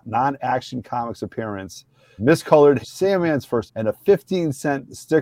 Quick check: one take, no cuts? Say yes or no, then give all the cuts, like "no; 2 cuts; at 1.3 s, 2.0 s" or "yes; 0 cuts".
no; 3 cuts; at 2.2 s, 2.8 s, 3.7 s